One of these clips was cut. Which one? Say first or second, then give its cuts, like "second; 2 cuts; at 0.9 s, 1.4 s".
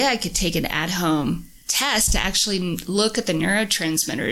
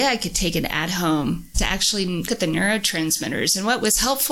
second; 2 cuts; at 1.5 s, 2.3 s